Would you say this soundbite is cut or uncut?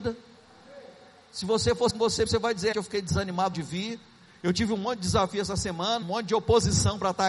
cut